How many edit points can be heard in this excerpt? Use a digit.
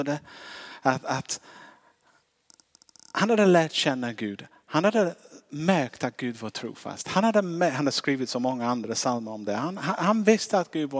0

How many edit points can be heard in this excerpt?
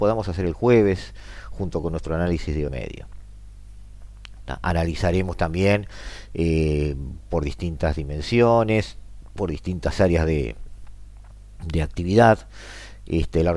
1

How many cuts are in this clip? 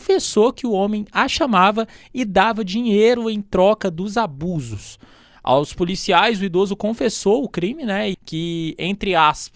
1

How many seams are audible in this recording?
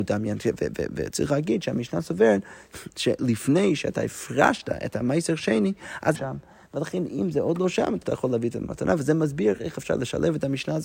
2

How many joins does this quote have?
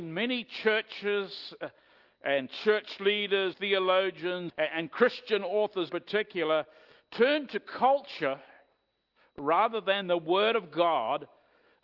3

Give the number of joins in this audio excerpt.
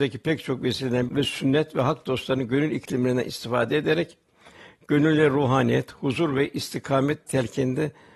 1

